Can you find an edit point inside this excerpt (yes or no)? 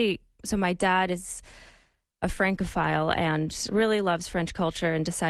no